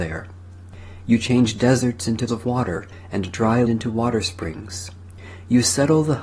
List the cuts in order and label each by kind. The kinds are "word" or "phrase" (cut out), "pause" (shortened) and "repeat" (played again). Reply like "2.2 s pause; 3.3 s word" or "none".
2.3 s word; 3.6 s word